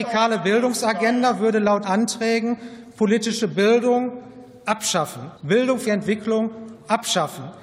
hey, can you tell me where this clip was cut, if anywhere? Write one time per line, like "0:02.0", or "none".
0:01.8
0:05.4
0:05.9